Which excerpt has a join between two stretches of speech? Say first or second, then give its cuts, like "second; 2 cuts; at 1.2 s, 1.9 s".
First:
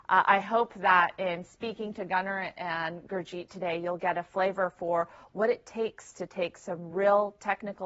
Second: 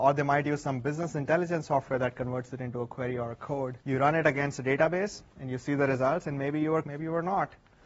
second; 3 cuts; at 3.8 s, 5.3 s, 6.8 s